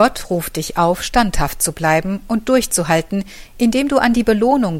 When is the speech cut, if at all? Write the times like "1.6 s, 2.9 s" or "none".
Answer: none